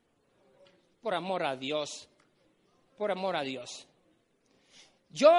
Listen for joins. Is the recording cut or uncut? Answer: uncut